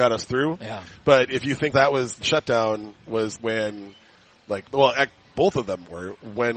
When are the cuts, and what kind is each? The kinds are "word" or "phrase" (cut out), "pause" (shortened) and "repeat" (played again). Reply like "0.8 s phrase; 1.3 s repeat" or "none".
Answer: 1.7 s phrase; 2.2 s word; 3.4 s word; 4.7 s pause